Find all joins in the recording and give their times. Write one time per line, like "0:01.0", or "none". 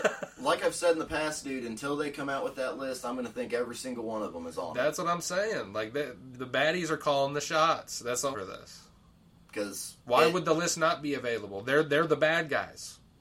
0:06.3
0:08.3
0:10.0